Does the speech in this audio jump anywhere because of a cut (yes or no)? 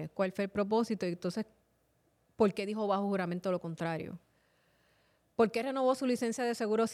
no